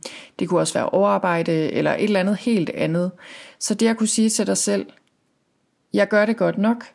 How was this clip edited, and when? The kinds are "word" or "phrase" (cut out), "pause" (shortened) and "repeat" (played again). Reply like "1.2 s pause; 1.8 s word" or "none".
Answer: none